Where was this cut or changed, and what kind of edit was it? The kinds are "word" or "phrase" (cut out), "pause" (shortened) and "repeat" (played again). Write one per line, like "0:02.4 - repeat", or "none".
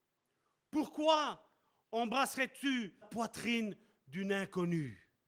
0:03.0 - word